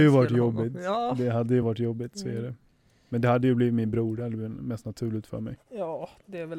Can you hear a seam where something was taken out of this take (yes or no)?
no